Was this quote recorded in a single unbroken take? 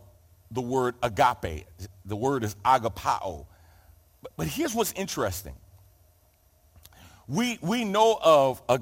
yes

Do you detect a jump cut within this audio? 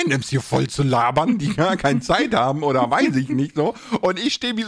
no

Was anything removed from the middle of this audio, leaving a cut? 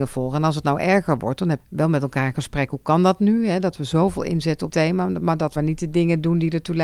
yes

